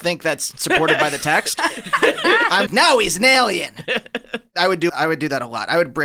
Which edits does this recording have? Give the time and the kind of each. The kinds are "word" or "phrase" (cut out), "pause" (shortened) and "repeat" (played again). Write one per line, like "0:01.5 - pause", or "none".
0:02.7 - word
0:04.9 - word